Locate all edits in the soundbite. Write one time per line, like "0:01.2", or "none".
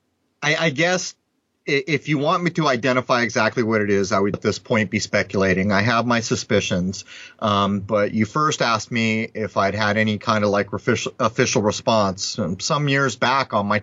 0:04.3